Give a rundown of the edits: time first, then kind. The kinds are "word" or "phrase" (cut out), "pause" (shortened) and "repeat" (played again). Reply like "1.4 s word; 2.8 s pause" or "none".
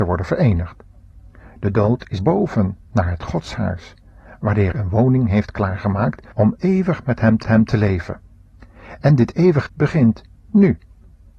2.2 s phrase; 2.8 s pause; 4.7 s word; 6.3 s pause; 7.4 s repeat; 9.7 s word